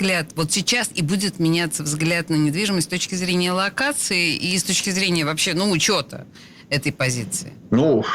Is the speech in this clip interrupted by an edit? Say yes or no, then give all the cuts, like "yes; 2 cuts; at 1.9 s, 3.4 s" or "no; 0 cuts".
no; 0 cuts